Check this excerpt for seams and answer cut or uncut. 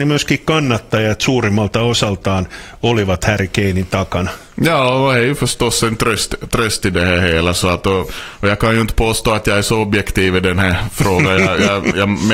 uncut